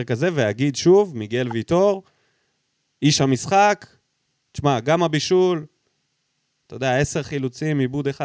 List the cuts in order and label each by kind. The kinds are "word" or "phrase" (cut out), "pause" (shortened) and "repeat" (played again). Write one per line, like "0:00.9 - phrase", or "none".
none